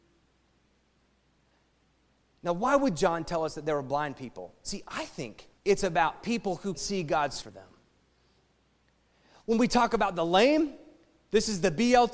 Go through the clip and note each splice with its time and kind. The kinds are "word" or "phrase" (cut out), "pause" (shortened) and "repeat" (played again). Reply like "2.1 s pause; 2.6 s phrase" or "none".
5.6 s pause; 6.7 s word; 7.4 s phrase